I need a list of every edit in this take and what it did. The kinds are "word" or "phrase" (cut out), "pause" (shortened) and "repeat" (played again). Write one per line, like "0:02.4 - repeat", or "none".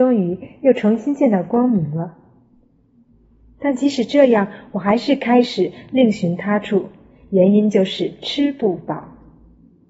none